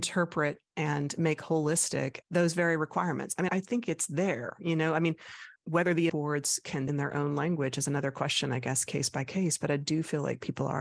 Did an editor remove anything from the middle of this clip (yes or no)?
yes